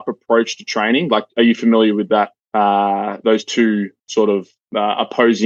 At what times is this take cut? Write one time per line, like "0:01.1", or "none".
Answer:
0:02.4